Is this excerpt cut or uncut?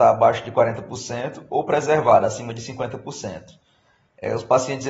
uncut